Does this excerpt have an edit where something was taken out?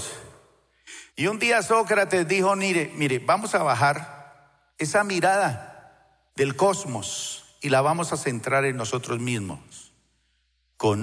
yes; 3 cuts; at 1.1 s, 4.7 s, 6.3 s

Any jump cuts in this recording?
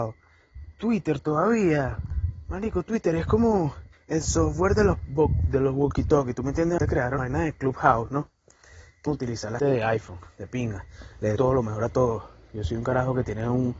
yes; 6 cuts; at 3.9 s, 6.8 s, 7.2 s, 9.1 s, 9.6 s, 11.4 s

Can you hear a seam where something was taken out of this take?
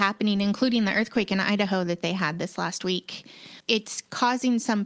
no; 0 cuts

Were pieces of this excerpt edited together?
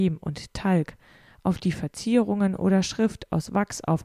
no; 0 cuts

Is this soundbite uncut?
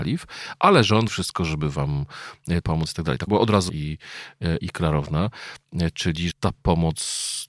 no; 6 cuts; at 1.1 s, 2.6 s, 3.3 s, 3.7 s, 4.6 s, 6.3 s

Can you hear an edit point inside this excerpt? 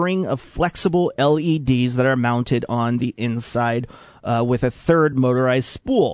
no; 0 cuts

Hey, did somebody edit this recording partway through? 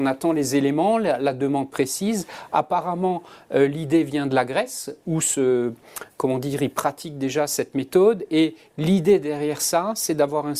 no; 0 cuts

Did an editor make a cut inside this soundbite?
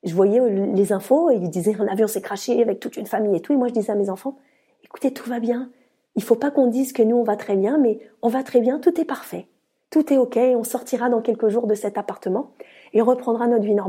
no; 0 cuts

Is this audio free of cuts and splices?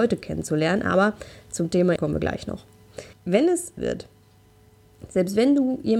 no; 3 cuts; at 2.0 s, 3.1 s, 3.8 s

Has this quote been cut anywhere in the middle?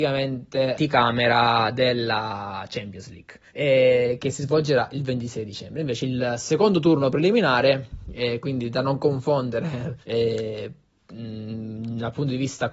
yes; 2 cuts; at 3.5 s, 10.0 s

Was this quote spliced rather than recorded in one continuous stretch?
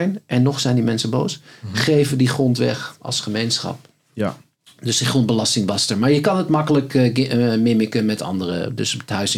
no; 0 cuts

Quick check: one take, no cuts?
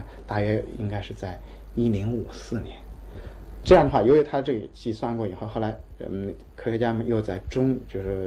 no; 1 cut; at 3.6 s

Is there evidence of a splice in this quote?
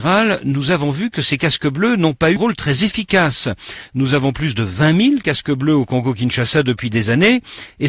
yes; 1 cut; at 2.4 s

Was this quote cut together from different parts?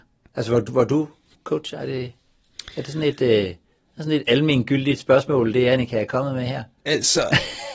no; 0 cuts

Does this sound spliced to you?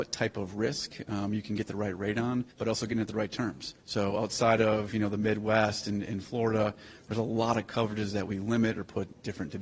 yes; 2 cuts; at 2.5 s, 3.8 s

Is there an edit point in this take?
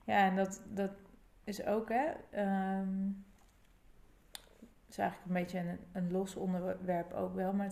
no; 0 cuts

